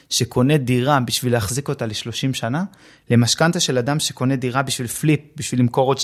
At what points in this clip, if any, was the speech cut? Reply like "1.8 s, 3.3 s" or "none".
none